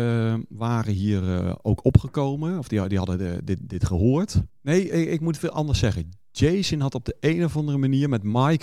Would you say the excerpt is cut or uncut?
cut